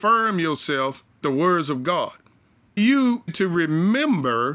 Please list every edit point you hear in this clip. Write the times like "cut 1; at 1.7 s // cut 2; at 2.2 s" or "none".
cut 1; at 1.2 s // cut 2; at 2.8 s // cut 3; at 3.3 s